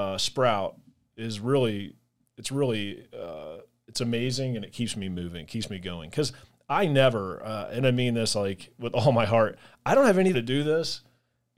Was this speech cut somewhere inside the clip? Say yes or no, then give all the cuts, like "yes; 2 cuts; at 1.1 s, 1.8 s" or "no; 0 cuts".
yes; 1 cut; at 10.3 s